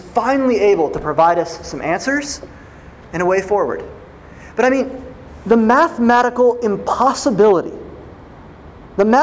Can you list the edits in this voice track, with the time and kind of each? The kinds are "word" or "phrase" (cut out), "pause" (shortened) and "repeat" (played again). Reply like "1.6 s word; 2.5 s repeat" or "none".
none